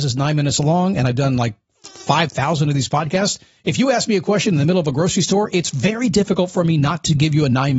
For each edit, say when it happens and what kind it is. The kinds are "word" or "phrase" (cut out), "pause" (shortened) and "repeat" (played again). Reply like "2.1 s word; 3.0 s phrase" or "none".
none